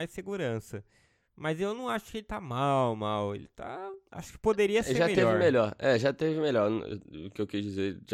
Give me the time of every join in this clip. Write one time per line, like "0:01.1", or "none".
0:04.1